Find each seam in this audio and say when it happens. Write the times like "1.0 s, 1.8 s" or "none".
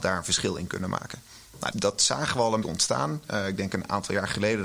1.7 s, 2.6 s